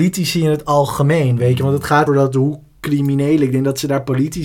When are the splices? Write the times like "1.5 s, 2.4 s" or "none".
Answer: 2.1 s